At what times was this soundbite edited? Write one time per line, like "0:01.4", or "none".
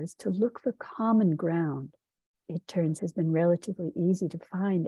0:02.4
0:03.0